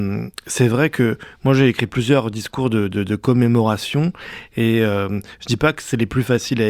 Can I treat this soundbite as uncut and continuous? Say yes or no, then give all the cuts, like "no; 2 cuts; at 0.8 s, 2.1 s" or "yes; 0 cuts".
yes; 0 cuts